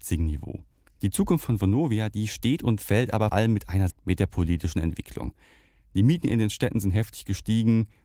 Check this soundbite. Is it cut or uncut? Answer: cut